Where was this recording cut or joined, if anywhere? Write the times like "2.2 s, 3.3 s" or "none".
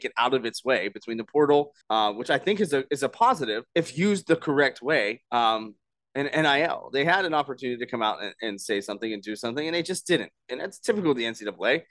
1.8 s, 3.7 s, 5.3 s